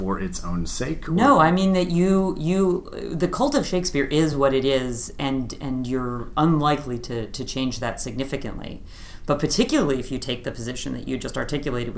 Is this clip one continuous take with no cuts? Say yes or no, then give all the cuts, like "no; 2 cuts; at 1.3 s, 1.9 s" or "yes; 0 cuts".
yes; 0 cuts